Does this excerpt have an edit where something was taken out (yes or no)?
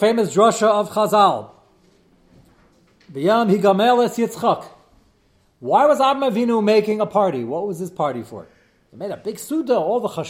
no